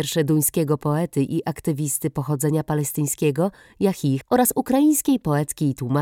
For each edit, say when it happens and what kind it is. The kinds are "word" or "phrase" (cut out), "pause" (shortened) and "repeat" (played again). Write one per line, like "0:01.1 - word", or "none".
0:04.2 - word